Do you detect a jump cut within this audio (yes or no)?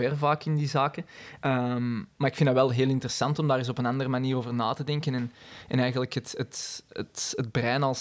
no